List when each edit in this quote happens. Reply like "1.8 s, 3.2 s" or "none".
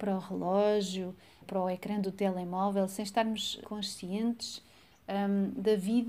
1.4 s, 3.6 s